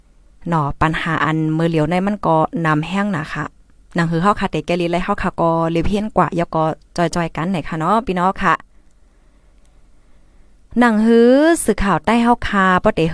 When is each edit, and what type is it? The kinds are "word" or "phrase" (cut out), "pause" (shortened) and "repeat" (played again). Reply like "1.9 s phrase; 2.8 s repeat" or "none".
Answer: none